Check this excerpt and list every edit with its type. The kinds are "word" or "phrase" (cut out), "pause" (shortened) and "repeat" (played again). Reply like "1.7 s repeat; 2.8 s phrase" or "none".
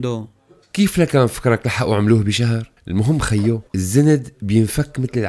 2.8 s pause; 3.7 s pause